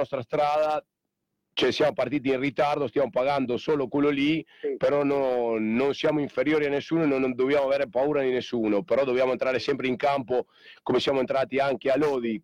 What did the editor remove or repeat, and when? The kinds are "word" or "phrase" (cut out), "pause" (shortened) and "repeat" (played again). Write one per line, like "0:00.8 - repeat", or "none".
none

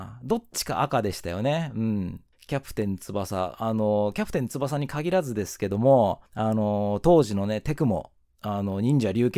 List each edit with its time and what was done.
0:02.3 - pause
0:06.3 - pause
0:08.2 - pause

